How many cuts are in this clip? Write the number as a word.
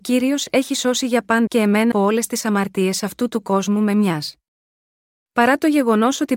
two